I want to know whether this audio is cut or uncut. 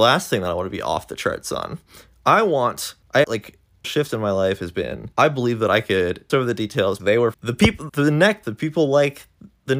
cut